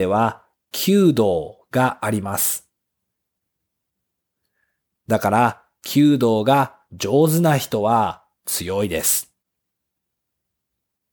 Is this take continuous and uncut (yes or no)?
yes